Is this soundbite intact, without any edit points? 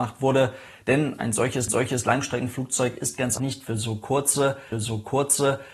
no; 3 cuts; at 1.7 s, 3.4 s, 4.7 s

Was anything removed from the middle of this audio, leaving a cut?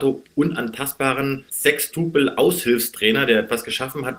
yes; 1 cut; at 1.5 s

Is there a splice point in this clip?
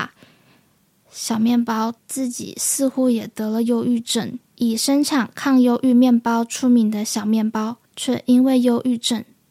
yes; 3 cuts; at 2.0 s, 4.4 s, 7.9 s

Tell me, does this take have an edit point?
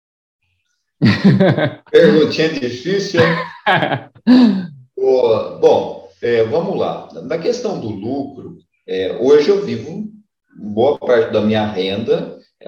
no; 0 cuts

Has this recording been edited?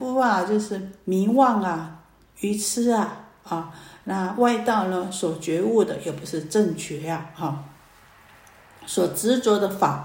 no; 0 cuts

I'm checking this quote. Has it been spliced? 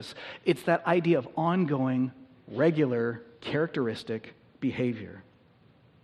no; 0 cuts

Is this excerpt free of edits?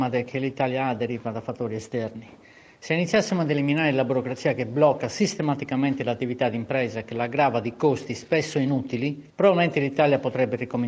yes; 0 cuts

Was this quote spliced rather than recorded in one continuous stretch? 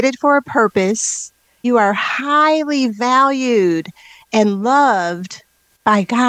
yes; 1 cut; at 1.6 s

